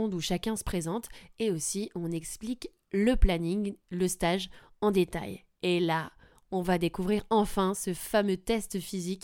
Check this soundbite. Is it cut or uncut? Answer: uncut